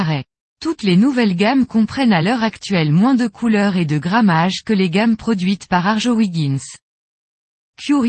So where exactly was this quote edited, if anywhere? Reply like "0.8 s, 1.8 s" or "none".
none